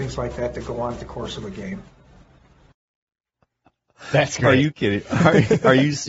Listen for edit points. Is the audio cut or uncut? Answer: cut